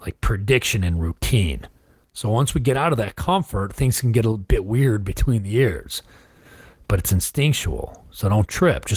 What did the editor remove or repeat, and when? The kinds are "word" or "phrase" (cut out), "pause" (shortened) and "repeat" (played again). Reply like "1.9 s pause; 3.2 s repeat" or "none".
none